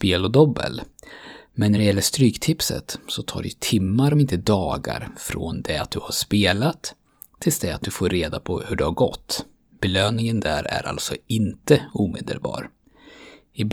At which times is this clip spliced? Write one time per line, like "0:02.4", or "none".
none